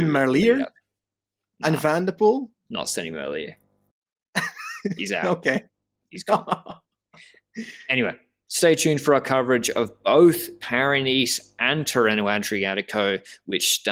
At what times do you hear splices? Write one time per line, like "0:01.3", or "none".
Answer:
none